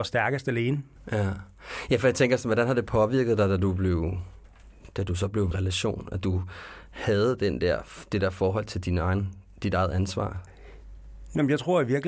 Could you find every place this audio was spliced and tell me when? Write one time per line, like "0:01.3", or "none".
0:05.5